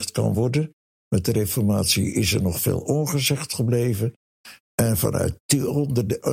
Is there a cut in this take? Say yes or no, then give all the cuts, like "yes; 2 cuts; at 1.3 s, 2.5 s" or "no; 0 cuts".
no; 0 cuts